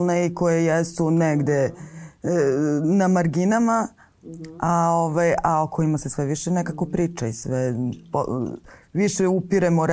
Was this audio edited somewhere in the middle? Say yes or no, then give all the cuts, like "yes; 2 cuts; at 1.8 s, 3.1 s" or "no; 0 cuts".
no; 0 cuts